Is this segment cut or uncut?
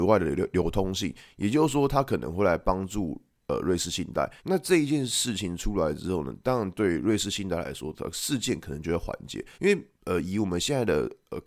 cut